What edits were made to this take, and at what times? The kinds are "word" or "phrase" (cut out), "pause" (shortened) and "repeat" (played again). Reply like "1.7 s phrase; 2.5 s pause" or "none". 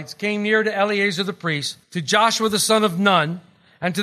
1.8 s pause